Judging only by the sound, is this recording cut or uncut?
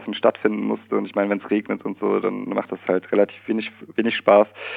uncut